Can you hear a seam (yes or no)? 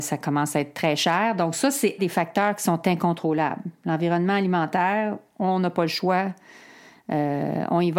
yes